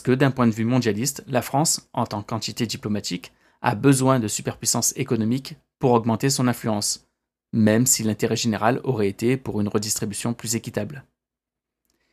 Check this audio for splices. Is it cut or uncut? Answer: uncut